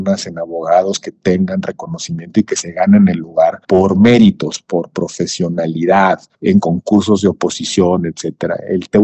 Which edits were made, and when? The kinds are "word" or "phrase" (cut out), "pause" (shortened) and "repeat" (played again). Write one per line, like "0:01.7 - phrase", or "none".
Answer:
none